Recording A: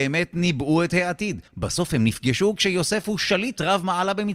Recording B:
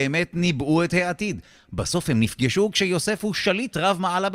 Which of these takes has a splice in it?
A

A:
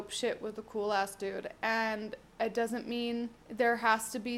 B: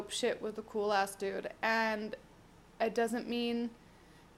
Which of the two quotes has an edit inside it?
A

